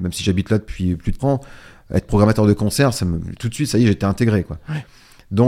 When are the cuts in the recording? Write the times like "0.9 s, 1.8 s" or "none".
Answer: 1.2 s